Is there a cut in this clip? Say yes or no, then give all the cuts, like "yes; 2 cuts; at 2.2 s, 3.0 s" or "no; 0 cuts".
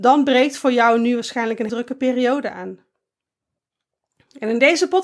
yes; 1 cut; at 1.7 s